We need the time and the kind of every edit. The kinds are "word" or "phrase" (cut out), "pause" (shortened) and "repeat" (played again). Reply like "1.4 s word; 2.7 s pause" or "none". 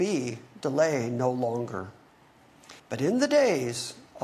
2.8 s pause